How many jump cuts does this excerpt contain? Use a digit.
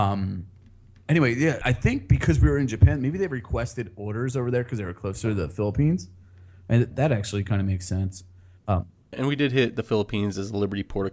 3